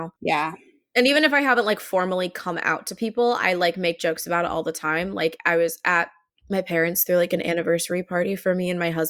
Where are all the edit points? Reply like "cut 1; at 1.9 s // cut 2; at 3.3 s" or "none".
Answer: none